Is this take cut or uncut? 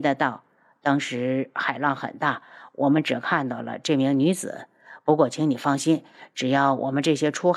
uncut